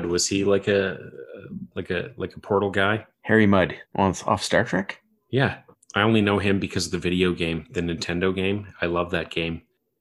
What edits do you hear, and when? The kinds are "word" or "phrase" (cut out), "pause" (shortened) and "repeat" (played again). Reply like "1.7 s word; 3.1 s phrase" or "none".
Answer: 3.1 s pause; 3.8 s pause; 5.7 s pause